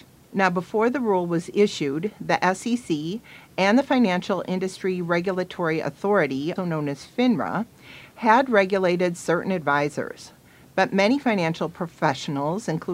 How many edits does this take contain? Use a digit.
1